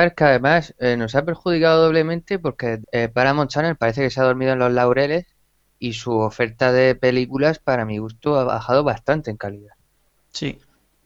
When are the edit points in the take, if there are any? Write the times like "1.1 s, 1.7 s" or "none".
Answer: 2.8 s